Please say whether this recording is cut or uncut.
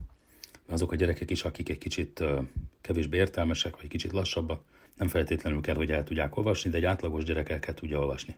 cut